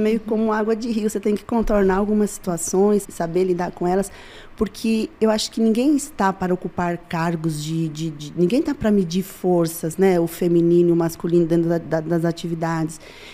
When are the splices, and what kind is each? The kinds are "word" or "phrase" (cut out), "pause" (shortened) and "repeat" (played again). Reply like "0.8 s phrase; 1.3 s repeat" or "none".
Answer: 3.0 s word